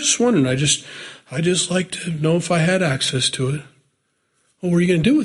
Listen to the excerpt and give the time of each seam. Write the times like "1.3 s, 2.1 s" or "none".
none